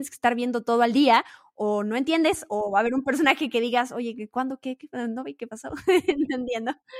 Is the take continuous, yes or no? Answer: yes